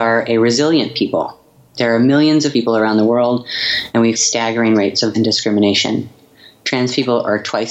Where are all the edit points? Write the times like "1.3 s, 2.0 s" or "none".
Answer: 2.5 s, 4.2 s, 5.1 s